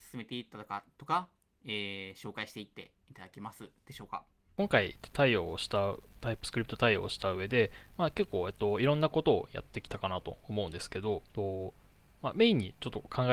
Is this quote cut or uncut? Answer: cut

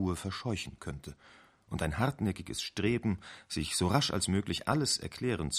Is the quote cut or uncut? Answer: uncut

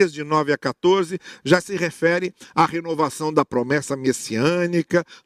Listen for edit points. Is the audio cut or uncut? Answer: uncut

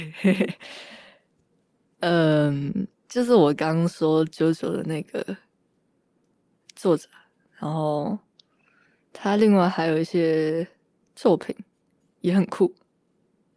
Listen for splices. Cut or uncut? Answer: uncut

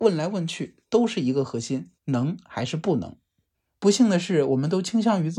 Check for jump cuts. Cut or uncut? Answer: cut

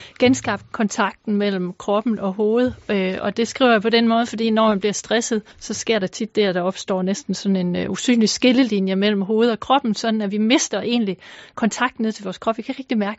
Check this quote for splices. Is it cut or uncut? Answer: cut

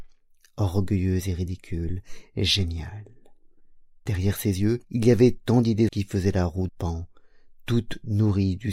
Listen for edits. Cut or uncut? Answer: cut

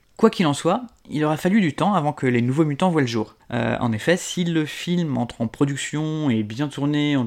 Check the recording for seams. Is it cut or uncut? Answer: uncut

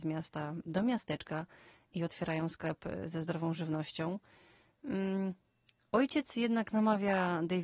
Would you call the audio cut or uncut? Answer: uncut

